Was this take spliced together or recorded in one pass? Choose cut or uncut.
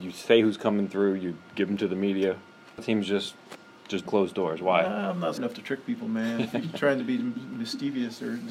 cut